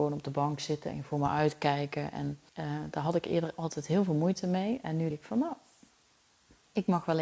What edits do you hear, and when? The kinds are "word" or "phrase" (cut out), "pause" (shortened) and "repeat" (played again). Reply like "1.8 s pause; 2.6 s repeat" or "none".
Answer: 2.5 s pause; 5.1 s word